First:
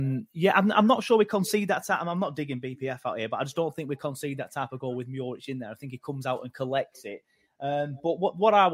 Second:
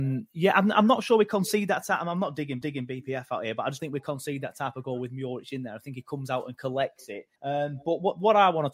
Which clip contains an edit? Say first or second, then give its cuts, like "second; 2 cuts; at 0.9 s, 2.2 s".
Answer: second; 3 cuts; at 2.6 s, 3.8 s, 7.4 s